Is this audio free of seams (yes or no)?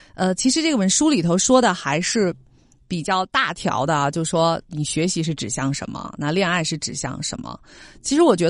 yes